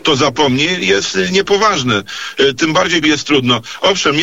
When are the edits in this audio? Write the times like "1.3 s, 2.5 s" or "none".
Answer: 3.0 s